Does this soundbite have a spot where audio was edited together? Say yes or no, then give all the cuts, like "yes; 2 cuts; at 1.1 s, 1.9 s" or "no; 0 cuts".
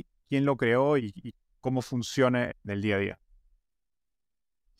yes; 2 cuts; at 1.0 s, 2.5 s